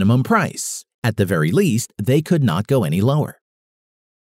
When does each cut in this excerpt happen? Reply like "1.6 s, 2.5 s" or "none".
none